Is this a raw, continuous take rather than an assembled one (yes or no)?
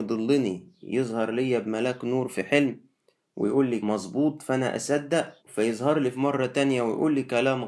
no